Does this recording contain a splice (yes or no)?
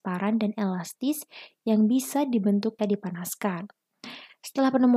yes